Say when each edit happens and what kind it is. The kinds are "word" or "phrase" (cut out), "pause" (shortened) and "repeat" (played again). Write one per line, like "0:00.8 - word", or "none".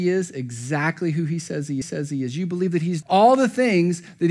0:01.8 - repeat
0:03.0 - word